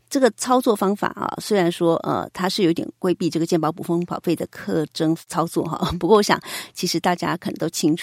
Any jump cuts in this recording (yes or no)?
no